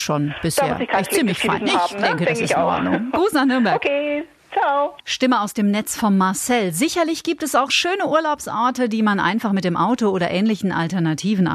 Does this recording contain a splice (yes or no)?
yes